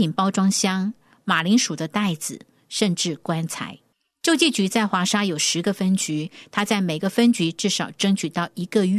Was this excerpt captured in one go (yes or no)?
yes